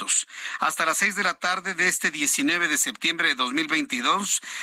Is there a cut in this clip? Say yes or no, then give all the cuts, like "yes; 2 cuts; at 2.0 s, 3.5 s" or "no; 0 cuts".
no; 0 cuts